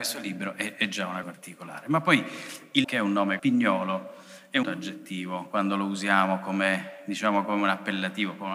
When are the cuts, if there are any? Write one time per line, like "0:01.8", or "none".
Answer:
0:01.2
0:02.8
0:03.4
0:04.6